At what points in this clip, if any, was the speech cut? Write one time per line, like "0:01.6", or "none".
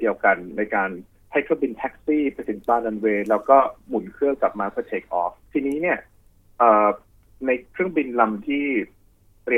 0:05.4